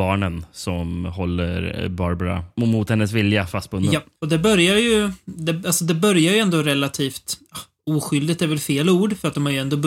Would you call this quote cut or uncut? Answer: cut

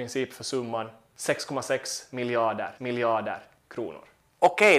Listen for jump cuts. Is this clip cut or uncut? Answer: cut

